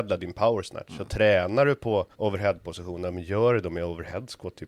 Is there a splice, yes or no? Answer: yes